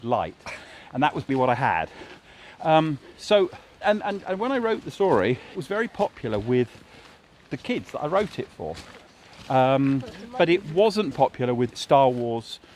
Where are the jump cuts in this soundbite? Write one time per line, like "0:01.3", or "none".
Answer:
0:01.3
0:03.8
0:05.5
0:11.1
0:11.7

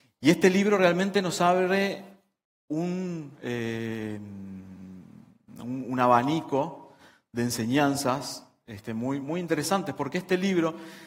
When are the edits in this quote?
0:09.2

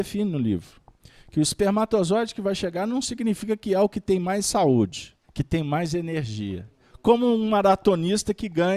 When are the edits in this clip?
0:05.2

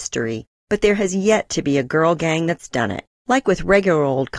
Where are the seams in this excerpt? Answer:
none

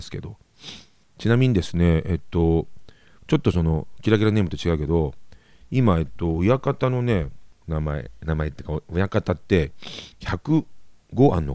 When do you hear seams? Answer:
0:10.1

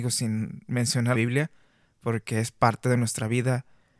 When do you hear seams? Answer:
0:01.1

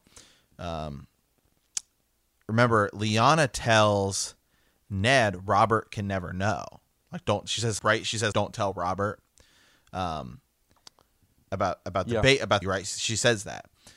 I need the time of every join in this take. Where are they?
0:07.8
0:08.3
0:12.6

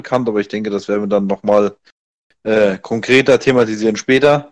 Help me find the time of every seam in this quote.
none

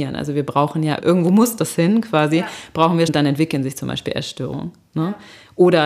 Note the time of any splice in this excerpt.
0:01.0
0:03.1

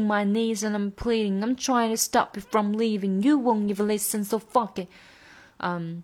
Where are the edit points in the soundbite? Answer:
none

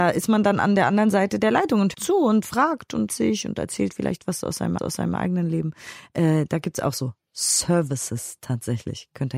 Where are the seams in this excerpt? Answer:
0:01.9
0:03.1
0:04.8

